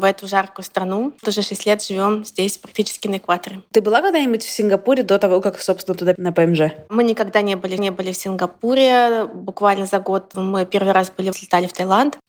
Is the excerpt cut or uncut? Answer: cut